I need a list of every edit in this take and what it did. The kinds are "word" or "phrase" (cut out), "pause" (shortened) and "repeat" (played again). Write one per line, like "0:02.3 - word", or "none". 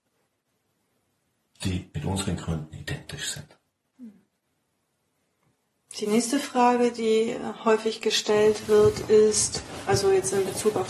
none